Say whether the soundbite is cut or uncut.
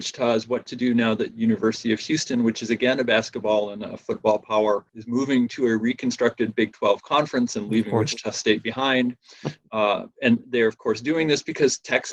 cut